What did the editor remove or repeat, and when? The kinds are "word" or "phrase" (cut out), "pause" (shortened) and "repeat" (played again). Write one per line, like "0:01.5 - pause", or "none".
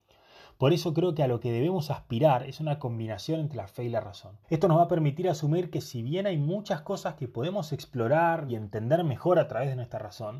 0:04.4 - pause
0:08.5 - word